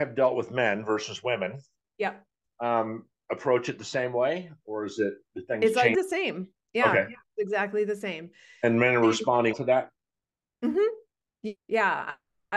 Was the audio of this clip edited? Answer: yes; 3 cuts; at 5.9 s, 9.5 s, 11.6 s

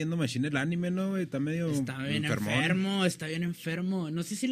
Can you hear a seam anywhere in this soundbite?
no; 0 cuts

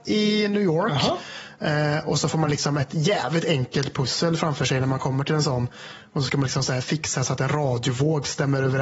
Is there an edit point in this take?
no; 0 cuts

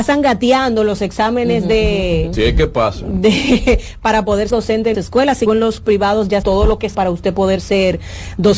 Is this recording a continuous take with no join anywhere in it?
no; 6 cuts; at 4.5 s, 4.9 s, 5.5 s, 5.8 s, 6.4 s, 6.9 s

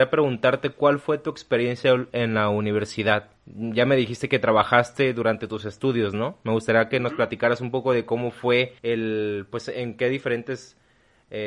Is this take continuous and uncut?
no; 2 cuts; at 3.4 s, 8.8 s

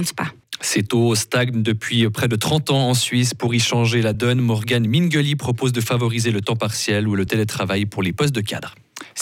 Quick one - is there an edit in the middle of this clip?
no; 0 cuts

